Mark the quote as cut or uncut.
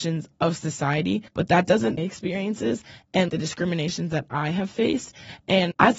cut